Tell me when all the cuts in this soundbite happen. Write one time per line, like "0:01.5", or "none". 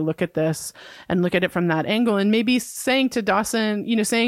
none